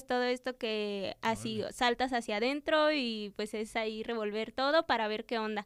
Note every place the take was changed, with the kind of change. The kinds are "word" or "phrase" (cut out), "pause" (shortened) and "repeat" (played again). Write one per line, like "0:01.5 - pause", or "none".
none